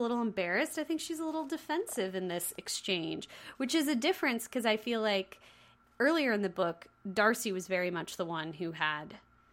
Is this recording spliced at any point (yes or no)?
no